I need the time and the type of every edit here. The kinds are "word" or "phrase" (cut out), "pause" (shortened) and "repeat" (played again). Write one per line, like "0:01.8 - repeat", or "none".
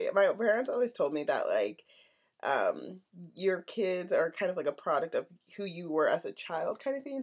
none